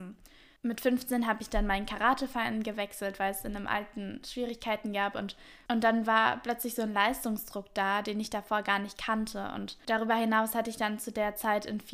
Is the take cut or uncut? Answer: uncut